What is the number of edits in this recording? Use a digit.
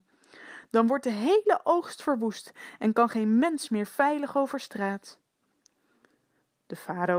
0